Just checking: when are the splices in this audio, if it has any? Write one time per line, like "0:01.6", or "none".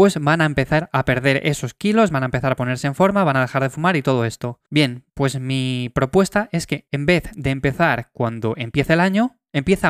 0:04.7